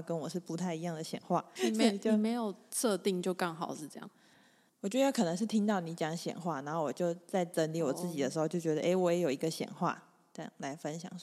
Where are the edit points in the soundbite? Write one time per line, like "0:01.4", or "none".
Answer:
0:01.6